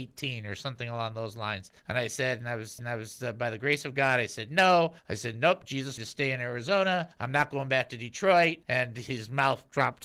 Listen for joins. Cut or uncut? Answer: cut